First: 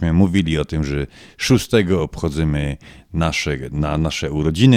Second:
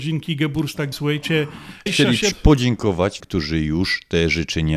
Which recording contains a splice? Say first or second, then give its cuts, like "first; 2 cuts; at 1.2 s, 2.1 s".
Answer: second; 4 cuts; at 0.9 s, 1.9 s, 2.3 s, 3.2 s